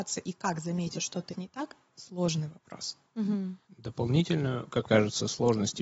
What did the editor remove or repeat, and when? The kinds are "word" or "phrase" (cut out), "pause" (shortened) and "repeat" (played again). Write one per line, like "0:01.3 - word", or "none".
0:00.9 - word
0:01.3 - word
0:01.9 - word
0:03.6 - pause
0:04.8 - word